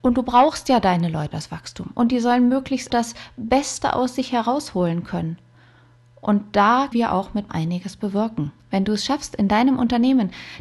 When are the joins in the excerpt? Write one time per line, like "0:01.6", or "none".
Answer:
0:01.3
0:02.9
0:06.9
0:07.5
0:08.6

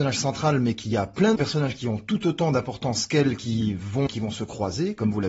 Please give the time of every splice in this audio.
0:01.4
0:04.1

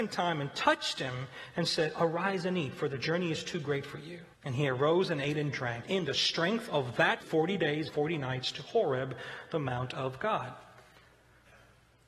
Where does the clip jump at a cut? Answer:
0:04.3
0:05.8
0:07.2
0:07.9

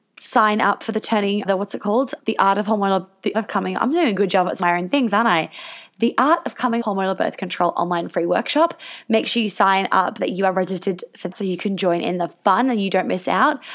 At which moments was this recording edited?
0:01.4
0:02.2
0:03.3
0:04.6
0:06.8
0:10.2
0:11.3

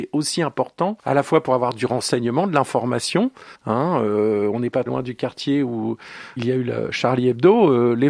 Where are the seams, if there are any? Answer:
0:01.0
0:03.5
0:04.9
0:06.4

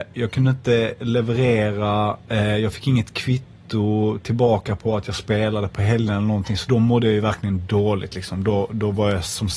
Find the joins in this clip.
none

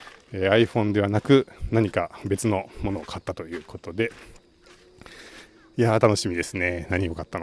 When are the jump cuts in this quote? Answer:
none

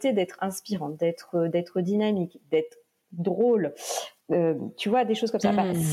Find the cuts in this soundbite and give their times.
0:04.2

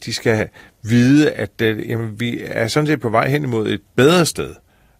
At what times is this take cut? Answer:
none

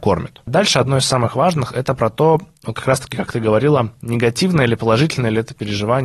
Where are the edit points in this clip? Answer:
none

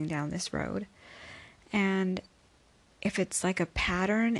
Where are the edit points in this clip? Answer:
none

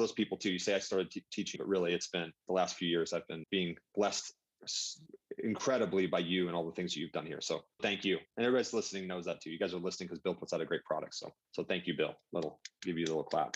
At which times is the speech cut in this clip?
0:01.6
0:02.4
0:03.4
0:07.8
0:08.3
0:11.4

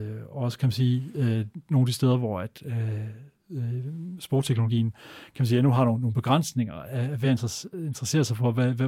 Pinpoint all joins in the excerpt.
none

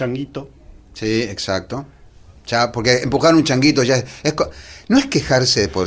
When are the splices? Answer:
none

